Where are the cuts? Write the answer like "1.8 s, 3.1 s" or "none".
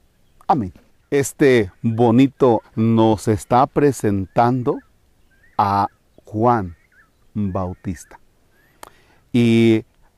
2.6 s